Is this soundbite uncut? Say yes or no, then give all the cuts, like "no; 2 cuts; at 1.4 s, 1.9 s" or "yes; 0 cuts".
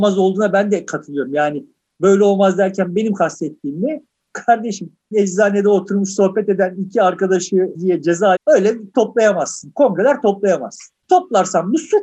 no; 4 cuts; at 5.1 s, 7.7 s, 8.3 s, 8.9 s